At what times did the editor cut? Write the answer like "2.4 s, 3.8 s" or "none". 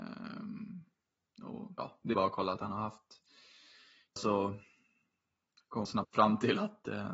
2.1 s, 2.6 s, 4.2 s, 5.9 s